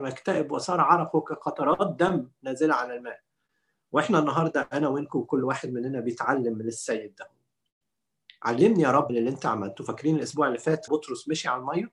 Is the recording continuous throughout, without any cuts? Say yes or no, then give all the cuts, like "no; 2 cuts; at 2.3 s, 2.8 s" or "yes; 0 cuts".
no; 2 cuts; at 9.1 s, 10.9 s